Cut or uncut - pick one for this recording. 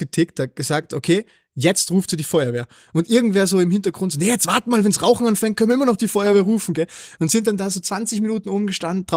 uncut